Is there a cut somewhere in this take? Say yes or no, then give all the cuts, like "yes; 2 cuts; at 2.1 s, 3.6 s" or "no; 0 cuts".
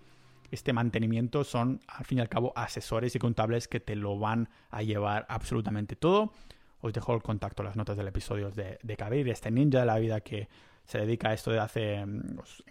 no; 0 cuts